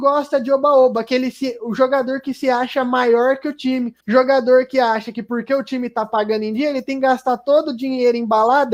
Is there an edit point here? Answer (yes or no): yes